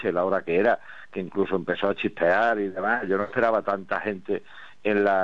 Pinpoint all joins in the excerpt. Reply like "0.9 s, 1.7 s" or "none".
none